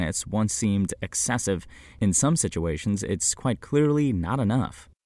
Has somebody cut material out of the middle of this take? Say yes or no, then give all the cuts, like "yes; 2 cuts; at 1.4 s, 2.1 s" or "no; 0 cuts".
no; 0 cuts